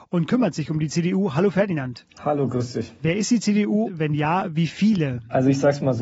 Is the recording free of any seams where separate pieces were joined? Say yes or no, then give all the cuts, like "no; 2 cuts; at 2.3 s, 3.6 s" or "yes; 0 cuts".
no; 1 cut; at 3.9 s